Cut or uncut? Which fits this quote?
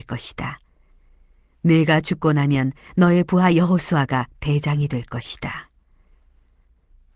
uncut